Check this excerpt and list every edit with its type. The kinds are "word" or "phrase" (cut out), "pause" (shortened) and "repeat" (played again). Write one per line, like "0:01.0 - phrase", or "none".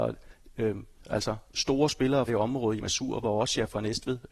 0:01.0 - word
0:02.3 - word
0:02.8 - phrase